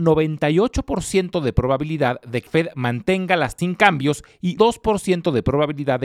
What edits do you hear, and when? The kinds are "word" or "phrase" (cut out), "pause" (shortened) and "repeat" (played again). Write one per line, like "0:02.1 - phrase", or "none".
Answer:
0:02.5 - word
0:03.6 - word
0:04.6 - word